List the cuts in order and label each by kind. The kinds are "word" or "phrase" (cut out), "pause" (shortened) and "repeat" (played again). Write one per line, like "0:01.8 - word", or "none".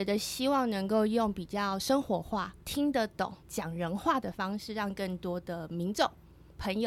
0:02.6 - pause
0:03.4 - pause